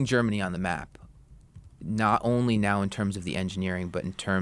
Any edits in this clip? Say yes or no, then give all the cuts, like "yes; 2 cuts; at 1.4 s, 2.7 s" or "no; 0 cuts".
no; 0 cuts